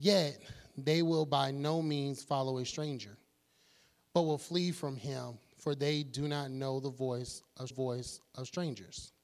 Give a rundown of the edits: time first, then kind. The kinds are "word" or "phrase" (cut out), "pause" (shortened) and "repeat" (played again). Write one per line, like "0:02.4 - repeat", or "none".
0:07.7 - repeat

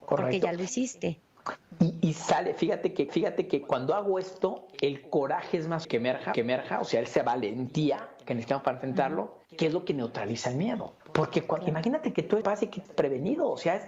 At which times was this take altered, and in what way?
0:03.1 - repeat
0:05.8 - word
0:06.3 - repeat
0:09.4 - pause
0:11.0 - pause
0:12.4 - word
0:12.8 - word

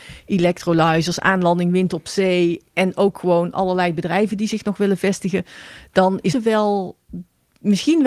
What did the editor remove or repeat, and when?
0:06.3 - word

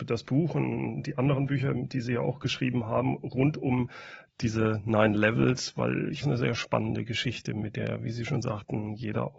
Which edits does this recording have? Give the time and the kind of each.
0:06.2 - phrase

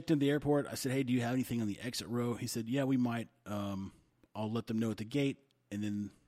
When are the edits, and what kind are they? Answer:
none

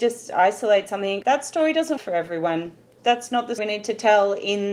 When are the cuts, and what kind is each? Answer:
0:01.2 - word
0:02.0 - word
0:03.0 - word
0:03.6 - word

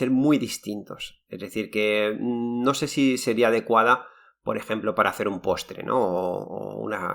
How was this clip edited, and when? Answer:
none

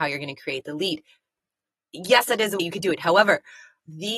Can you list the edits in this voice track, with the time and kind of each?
0:02.6 - word

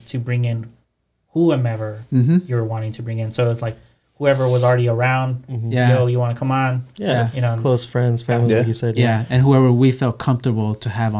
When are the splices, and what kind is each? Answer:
none

